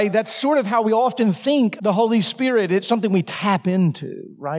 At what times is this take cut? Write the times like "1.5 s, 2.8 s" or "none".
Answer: 1.8 s